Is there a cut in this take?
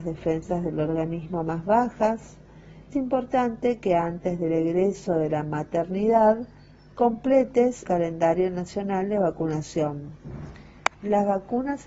yes; 3 cuts; at 2.9 s, 7.8 s, 10.9 s

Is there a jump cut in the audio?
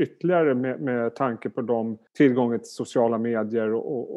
yes; 1 cut; at 2.1 s

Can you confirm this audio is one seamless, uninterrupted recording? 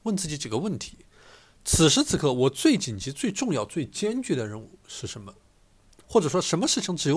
yes; 0 cuts

